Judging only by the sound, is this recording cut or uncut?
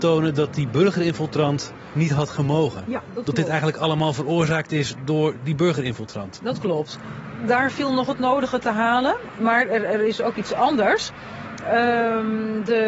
uncut